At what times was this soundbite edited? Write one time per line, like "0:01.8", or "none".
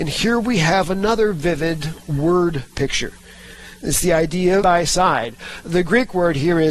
0:04.6